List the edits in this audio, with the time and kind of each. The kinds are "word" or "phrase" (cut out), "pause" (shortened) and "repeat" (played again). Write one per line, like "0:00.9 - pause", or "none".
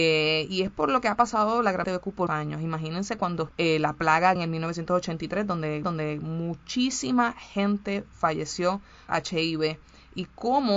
0:01.8 - phrase
0:02.3 - word
0:03.5 - word
0:04.4 - word
0:05.8 - repeat
0:09.1 - word